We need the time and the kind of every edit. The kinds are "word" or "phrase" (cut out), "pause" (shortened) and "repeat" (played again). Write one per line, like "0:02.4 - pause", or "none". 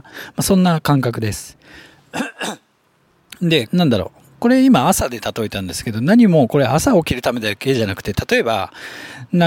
0:03.7 - phrase